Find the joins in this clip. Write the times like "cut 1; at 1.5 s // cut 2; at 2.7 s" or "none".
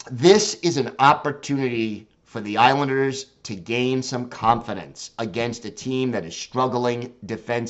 none